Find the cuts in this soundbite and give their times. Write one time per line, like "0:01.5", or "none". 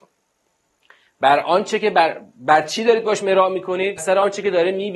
0:04.0